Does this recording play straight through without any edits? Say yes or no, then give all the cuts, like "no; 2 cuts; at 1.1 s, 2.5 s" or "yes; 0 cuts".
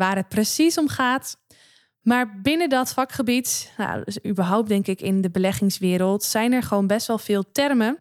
yes; 0 cuts